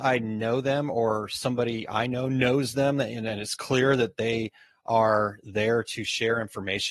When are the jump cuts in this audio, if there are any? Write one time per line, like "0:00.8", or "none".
none